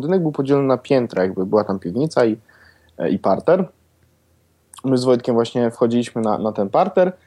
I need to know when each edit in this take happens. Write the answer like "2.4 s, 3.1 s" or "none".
none

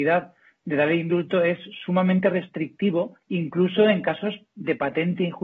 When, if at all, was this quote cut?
3.2 s

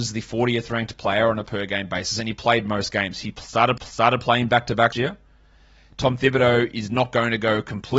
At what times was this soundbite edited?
3.8 s, 4.9 s

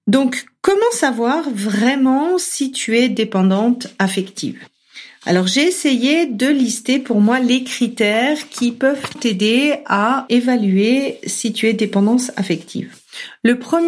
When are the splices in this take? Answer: 9.1 s

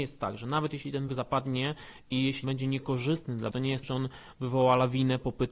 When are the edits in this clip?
1.1 s, 2.4 s, 3.5 s, 3.8 s

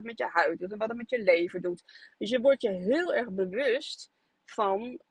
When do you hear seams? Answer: none

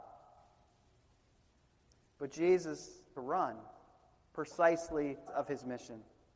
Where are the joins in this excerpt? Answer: 3.1 s, 5.3 s

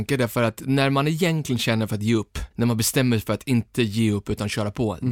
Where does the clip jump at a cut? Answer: 2.5 s

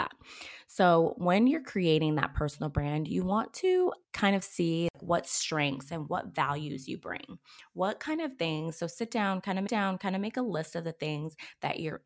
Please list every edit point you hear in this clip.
4.0 s, 9.7 s

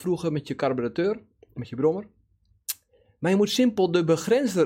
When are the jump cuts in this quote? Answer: none

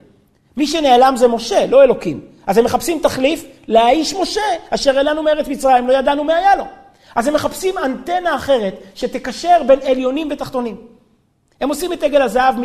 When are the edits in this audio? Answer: none

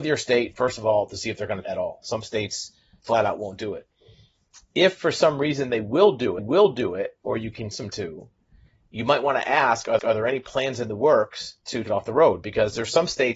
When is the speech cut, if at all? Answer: 1.6 s, 3.0 s, 6.4 s, 7.7 s, 10.0 s, 11.8 s

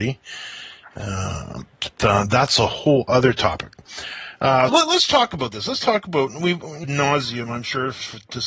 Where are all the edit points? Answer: 1.9 s, 4.7 s, 6.8 s

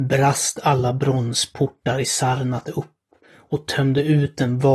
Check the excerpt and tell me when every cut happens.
none

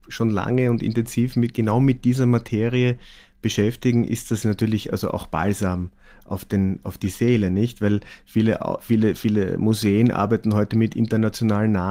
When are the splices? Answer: none

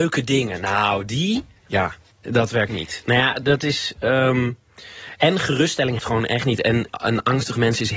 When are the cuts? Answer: 2.2 s, 2.7 s, 3.4 s, 6.0 s, 6.9 s

